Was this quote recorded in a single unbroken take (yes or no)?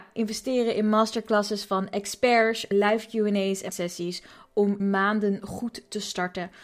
no